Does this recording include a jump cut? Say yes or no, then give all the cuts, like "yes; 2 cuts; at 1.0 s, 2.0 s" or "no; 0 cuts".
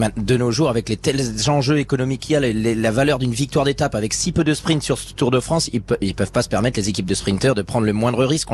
no; 0 cuts